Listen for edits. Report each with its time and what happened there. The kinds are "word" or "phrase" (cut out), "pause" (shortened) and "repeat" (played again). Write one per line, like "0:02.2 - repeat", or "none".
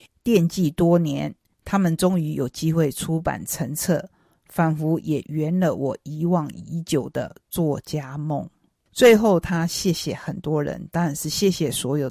none